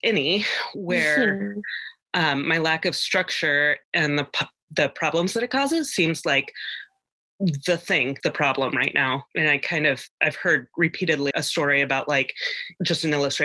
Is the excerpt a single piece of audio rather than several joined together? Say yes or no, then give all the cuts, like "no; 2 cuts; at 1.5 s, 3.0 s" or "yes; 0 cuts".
no; 3 cuts; at 3.8 s, 8.2 s, 11.3 s